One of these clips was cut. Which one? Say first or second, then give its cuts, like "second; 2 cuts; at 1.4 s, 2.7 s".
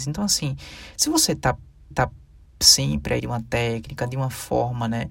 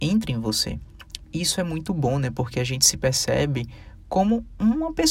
first; 2 cuts; at 1.9 s, 3.2 s